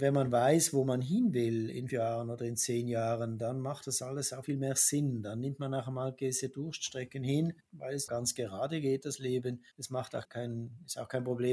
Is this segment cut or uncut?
cut